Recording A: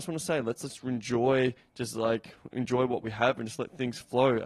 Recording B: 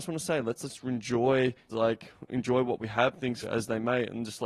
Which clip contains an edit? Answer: B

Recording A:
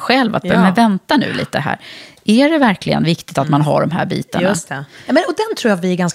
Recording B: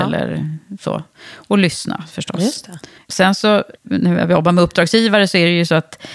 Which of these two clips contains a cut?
B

